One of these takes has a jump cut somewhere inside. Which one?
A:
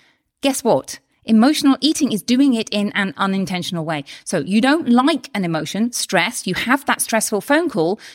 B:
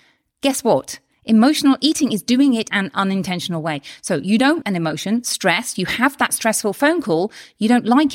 B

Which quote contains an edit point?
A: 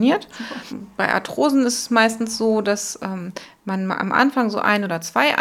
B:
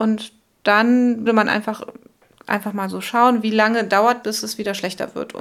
B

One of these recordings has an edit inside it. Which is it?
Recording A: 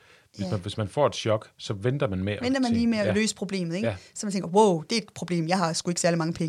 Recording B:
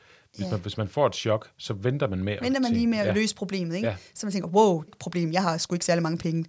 B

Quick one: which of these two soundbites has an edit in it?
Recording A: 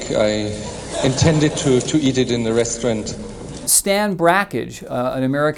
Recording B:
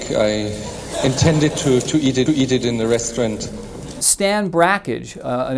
B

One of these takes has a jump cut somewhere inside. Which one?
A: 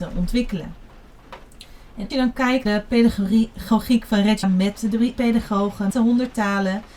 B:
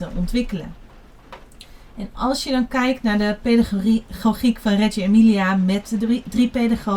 A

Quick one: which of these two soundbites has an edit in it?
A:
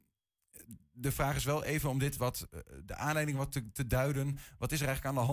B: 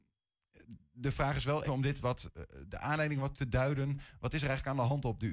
B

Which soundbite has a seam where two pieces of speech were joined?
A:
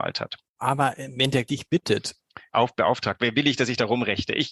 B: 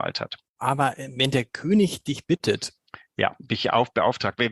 A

